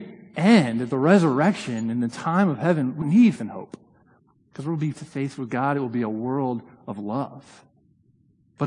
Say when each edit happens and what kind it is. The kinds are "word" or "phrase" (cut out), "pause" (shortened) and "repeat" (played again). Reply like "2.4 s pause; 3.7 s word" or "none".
3.0 s word; 3.4 s word; 4.9 s word